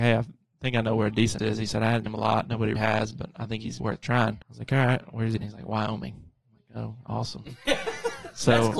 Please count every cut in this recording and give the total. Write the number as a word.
six